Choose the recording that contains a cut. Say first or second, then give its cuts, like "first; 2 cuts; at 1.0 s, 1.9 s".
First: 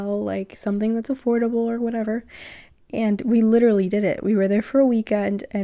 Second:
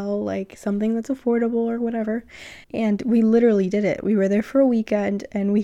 second; 1 cut; at 2.6 s